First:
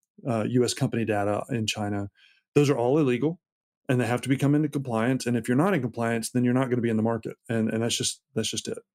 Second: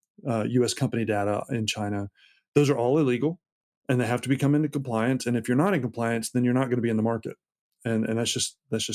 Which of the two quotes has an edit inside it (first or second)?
first